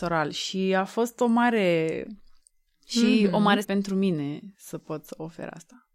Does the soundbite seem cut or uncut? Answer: cut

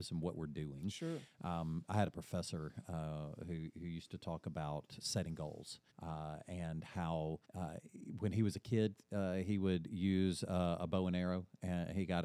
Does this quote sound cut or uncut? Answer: cut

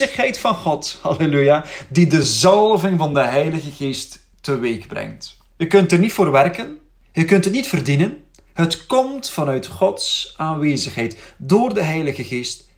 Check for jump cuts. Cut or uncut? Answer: uncut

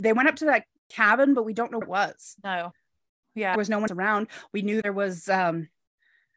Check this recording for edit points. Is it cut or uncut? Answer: cut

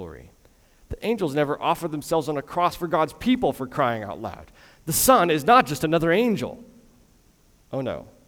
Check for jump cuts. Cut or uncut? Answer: uncut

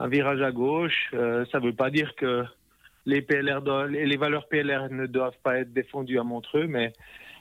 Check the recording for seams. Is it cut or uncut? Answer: uncut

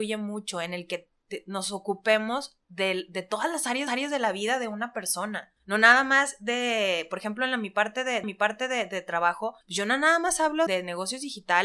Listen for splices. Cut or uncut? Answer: cut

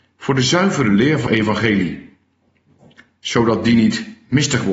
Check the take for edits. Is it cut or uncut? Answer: cut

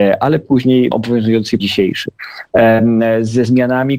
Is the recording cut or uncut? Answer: cut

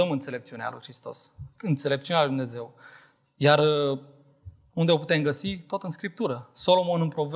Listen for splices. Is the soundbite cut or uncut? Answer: uncut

